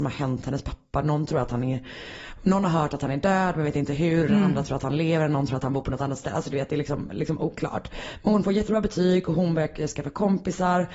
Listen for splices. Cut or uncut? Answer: uncut